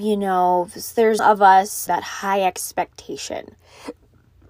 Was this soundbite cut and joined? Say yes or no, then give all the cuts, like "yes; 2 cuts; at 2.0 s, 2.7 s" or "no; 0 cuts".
yes; 2 cuts; at 1.2 s, 1.9 s